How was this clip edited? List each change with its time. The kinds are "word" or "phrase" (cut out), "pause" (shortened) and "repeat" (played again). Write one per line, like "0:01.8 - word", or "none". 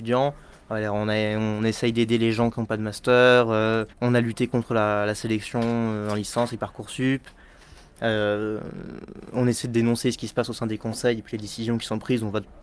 0:03.9 - pause

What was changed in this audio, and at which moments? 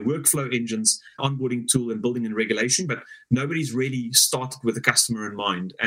0:01.2 - phrase

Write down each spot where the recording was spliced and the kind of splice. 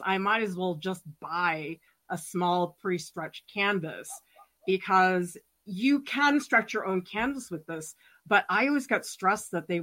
none

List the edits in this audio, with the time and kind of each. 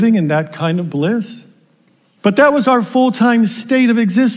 0:02.0 - pause

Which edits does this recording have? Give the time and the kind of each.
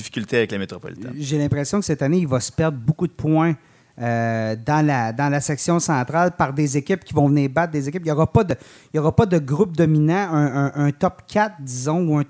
none

